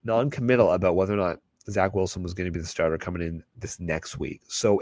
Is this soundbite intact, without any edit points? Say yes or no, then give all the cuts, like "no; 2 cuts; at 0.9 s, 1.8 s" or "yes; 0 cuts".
yes; 0 cuts